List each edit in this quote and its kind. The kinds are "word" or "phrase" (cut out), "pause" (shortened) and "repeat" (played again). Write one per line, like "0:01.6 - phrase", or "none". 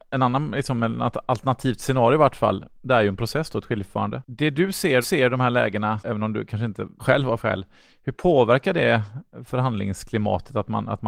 0:05.0 - repeat
0:07.0 - word
0:07.4 - word